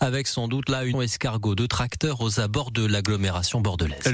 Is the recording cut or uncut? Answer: cut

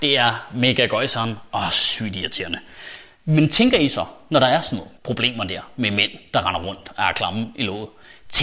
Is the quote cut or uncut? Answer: cut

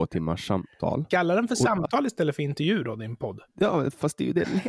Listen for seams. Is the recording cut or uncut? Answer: cut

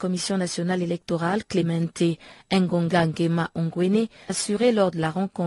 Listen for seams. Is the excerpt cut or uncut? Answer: cut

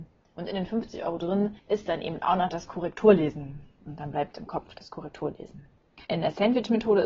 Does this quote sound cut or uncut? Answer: cut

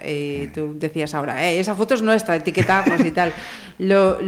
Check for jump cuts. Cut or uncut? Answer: uncut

